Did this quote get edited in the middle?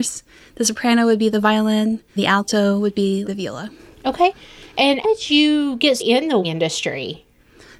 yes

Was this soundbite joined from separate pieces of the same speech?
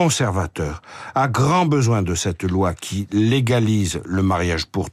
no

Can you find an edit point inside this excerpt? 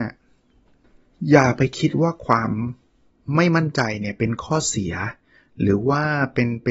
no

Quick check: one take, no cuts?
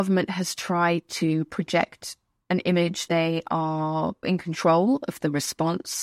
no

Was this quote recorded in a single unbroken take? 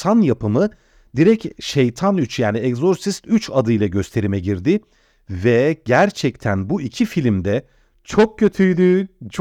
yes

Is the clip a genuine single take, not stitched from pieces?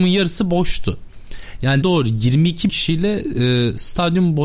no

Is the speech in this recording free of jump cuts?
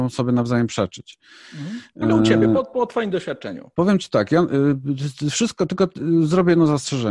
yes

